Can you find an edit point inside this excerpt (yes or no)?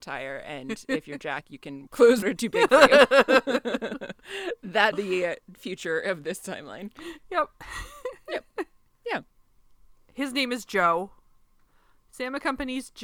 yes